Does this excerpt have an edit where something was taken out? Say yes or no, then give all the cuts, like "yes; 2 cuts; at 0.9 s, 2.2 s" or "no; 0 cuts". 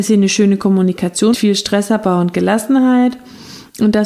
yes; 1 cut; at 1.3 s